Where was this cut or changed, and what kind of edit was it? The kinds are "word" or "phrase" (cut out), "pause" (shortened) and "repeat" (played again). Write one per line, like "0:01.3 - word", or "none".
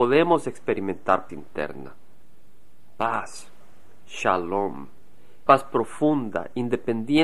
0:01.3 - word
0:05.5 - word